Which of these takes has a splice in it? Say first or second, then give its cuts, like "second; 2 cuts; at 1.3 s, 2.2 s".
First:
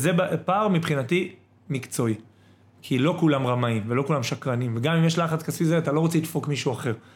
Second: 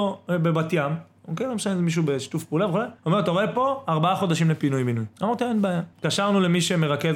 second; 3 cuts; at 3.0 s, 5.1 s, 5.9 s